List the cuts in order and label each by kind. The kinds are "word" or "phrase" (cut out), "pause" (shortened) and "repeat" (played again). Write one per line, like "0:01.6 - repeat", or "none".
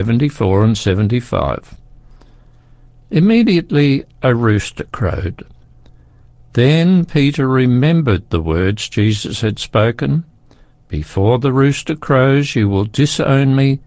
none